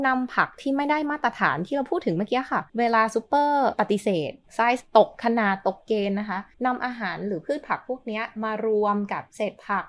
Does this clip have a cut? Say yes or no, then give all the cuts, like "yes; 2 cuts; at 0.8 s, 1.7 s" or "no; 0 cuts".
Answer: yes; 3 cuts; at 2.7 s, 4.4 s, 6.5 s